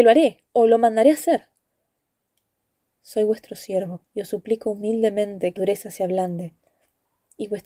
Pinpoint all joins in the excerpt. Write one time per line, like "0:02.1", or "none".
0:04.1
0:05.6